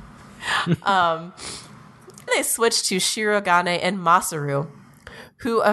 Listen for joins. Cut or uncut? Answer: cut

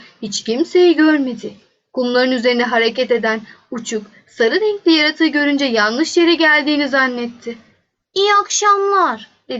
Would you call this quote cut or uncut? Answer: uncut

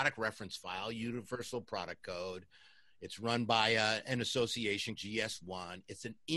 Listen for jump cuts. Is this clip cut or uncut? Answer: cut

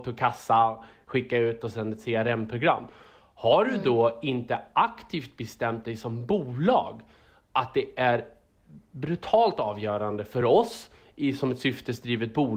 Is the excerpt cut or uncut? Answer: uncut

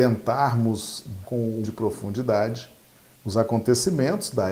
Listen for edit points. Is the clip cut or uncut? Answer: cut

